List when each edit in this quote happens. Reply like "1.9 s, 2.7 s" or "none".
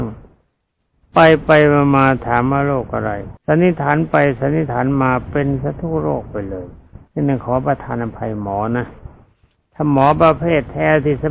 3.4 s, 7.1 s